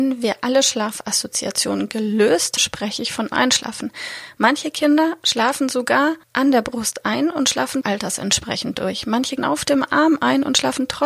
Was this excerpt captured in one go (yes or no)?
no